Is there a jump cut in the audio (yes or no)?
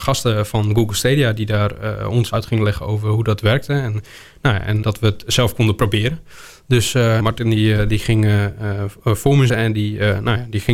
yes